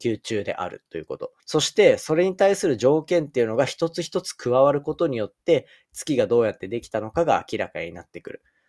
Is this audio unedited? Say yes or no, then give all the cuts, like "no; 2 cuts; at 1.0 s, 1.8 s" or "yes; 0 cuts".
no; 1 cut; at 1.4 s